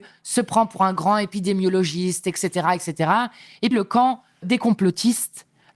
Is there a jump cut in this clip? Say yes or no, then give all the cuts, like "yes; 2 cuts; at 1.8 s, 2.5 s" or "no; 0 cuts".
yes; 2 cuts; at 3.7 s, 4.4 s